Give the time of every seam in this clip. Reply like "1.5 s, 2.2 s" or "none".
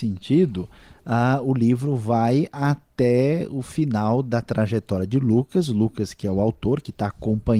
none